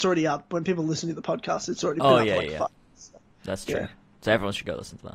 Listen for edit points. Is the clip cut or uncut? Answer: uncut